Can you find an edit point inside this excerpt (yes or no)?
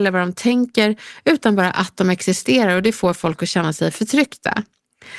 no